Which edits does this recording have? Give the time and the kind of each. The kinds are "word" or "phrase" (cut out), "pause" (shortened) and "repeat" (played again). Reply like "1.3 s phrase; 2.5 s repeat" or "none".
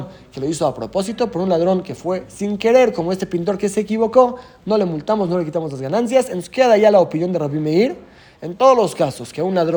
none